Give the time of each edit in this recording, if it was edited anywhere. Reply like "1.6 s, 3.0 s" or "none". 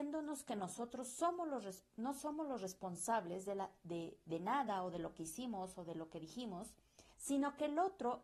7.1 s